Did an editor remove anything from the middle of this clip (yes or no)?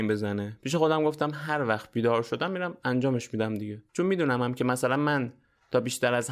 yes